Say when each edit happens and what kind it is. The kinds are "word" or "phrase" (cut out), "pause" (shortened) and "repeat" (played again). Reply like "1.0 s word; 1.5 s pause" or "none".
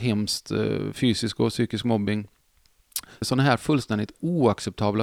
3.2 s word

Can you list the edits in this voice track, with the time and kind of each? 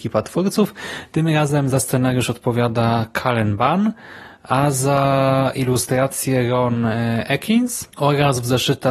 7.9 s pause

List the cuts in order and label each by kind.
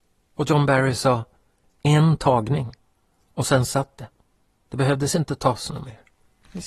none

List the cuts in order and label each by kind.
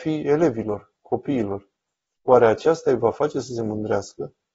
none

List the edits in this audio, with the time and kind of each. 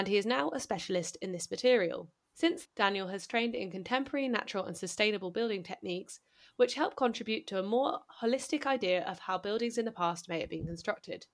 2.6 s word

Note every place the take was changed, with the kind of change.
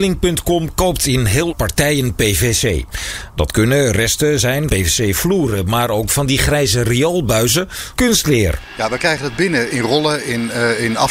1.5 s word; 4.7 s word; 8.0 s word; 9.7 s word

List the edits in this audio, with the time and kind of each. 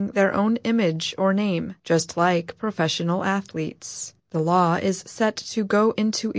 1.8 s pause; 4.2 s pause

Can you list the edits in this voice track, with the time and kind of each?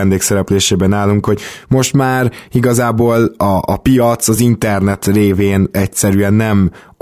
none

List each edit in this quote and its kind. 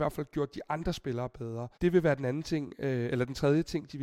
1.7 s pause

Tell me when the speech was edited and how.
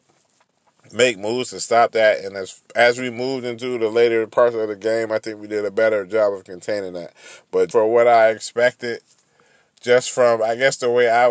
2.7 s pause; 7.7 s word

